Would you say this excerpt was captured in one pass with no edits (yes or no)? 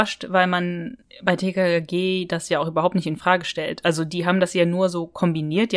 yes